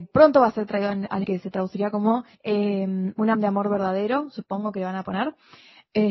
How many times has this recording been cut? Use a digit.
3